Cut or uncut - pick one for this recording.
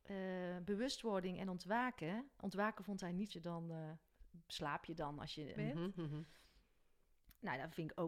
cut